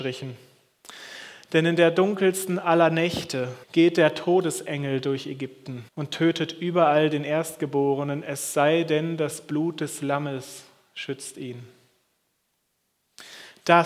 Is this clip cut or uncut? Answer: cut